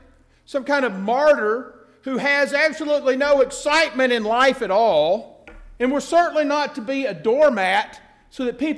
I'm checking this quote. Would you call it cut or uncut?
cut